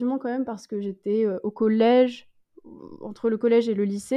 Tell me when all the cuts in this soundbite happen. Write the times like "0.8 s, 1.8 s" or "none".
none

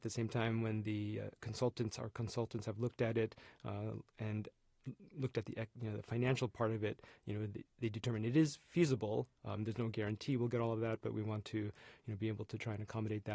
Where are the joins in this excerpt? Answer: 7.7 s

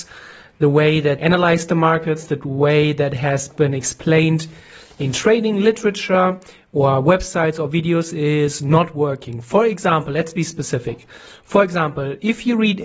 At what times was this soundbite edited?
1.2 s

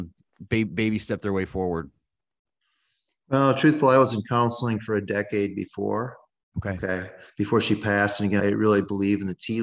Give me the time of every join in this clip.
8.4 s

